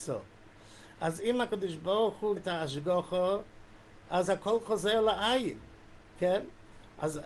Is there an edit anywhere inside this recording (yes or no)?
yes